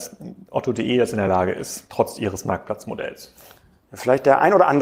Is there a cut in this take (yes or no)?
no